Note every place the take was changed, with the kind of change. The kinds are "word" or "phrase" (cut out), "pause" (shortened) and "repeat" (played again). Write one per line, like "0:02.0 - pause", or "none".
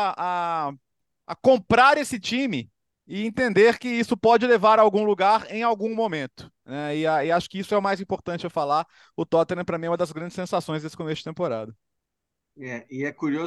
none